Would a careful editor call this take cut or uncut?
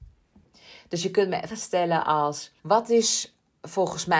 cut